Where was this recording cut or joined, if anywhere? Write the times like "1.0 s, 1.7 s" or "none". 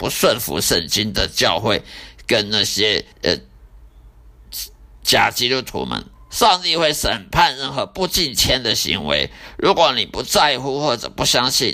3.1 s, 6.2 s